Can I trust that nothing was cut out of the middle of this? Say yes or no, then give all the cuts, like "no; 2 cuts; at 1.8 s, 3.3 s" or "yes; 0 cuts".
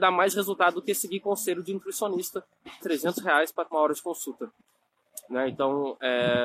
no; 2 cuts; at 2.8 s, 3.7 s